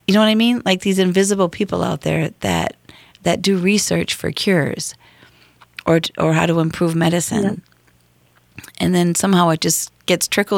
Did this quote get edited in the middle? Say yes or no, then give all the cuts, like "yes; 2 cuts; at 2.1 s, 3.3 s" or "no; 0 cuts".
no; 0 cuts